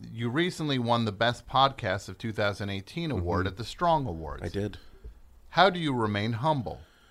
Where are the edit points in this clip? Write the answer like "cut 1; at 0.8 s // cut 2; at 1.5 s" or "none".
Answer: none